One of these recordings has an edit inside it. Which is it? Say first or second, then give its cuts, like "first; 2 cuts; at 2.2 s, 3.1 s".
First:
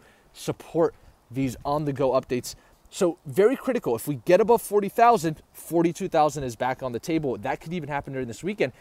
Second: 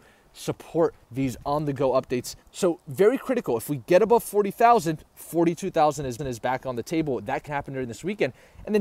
second; 4 cuts; at 1.0 s, 2.4 s, 6.2 s, 7.5 s